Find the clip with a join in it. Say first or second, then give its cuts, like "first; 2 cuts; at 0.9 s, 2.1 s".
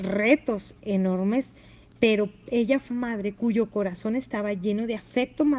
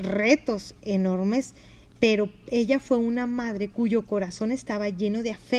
first; 1 cut; at 2.9 s